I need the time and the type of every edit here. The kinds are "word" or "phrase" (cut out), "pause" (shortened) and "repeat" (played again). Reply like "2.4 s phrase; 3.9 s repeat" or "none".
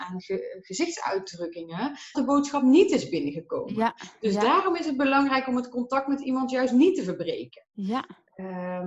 2.1 s word